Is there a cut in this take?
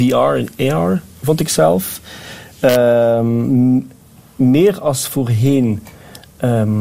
no; 0 cuts

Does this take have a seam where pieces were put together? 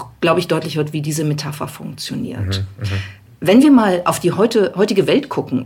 no; 0 cuts

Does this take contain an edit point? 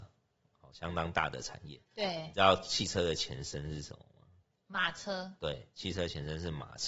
yes; 1 cut; at 4.4 s

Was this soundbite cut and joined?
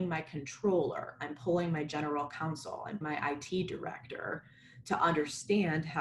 yes; 1 cut; at 3.0 s

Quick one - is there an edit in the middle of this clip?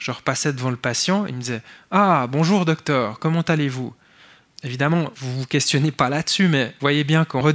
no; 0 cuts

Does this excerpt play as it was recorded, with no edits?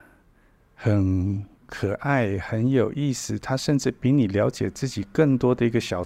no; 1 cut; at 1.5 s

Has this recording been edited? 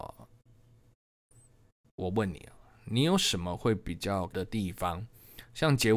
yes; 1 cut; at 4.3 s

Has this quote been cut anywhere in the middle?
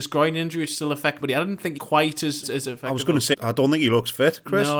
yes; 4 cuts; at 1.2 s, 1.8 s, 2.4 s, 3.3 s

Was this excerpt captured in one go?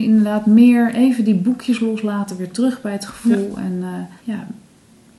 no; 1 cut; at 4.2 s

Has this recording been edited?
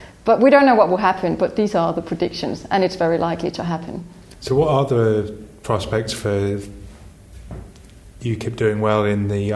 no; 0 cuts

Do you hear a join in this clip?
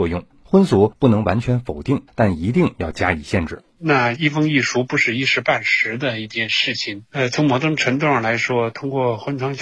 no; 0 cuts

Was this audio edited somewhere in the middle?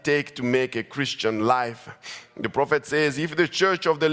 no; 0 cuts

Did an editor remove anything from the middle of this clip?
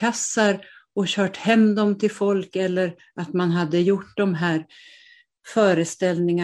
no; 0 cuts

